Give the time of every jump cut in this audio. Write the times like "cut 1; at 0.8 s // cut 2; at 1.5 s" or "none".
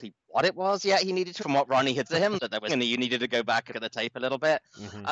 cut 1; at 1.4 s // cut 2; at 2.0 s // cut 3; at 2.7 s // cut 4; at 3.7 s